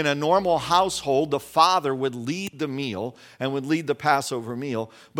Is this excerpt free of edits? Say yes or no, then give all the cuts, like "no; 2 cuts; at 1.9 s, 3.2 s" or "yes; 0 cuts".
yes; 0 cuts